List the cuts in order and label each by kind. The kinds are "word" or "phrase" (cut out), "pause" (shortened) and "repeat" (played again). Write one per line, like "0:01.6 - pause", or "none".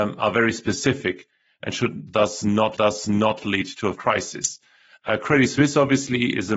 0:02.8 - repeat
0:03.9 - word